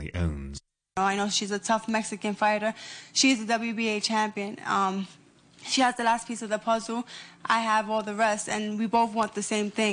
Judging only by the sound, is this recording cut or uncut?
uncut